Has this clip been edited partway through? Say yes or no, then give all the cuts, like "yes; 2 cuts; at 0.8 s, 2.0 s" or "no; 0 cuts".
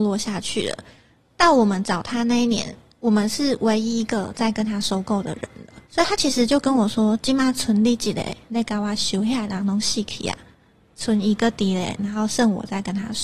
yes; 1 cut; at 5.9 s